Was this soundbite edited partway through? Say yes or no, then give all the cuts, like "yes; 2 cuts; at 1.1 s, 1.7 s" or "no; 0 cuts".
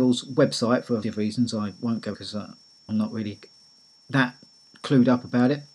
yes; 3 cuts; at 1.0 s, 2.1 s, 2.9 s